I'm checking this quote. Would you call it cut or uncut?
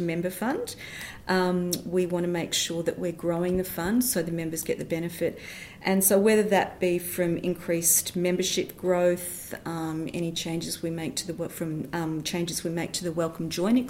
uncut